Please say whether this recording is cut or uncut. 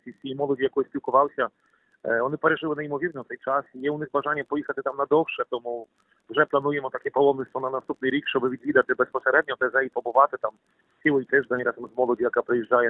uncut